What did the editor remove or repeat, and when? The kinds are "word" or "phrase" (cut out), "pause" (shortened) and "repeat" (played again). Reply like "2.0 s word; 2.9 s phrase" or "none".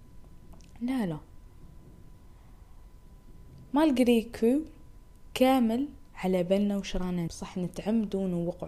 7.3 s word